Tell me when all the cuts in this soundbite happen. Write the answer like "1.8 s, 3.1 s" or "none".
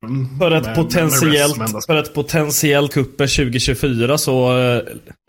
1.9 s, 2.9 s